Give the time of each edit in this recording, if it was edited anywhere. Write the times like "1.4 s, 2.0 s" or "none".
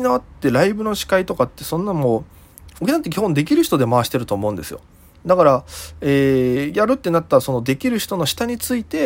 none